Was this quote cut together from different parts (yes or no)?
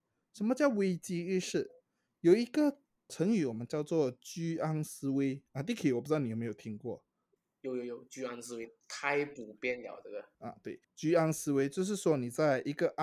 yes